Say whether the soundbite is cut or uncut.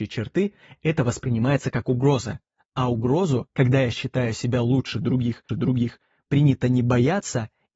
cut